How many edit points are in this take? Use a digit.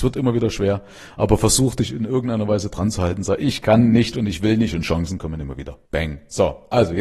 1